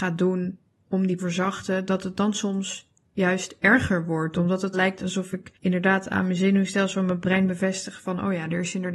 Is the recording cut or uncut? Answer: cut